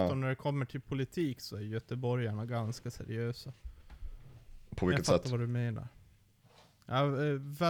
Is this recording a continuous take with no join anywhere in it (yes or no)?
yes